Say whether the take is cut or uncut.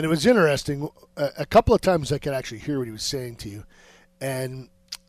uncut